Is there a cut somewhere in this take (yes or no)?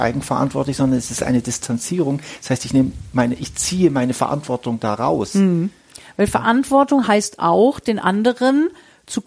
no